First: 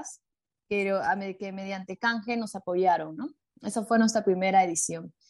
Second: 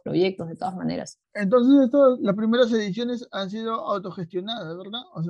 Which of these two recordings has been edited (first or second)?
second